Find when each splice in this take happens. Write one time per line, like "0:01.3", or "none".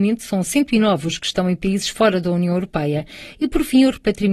none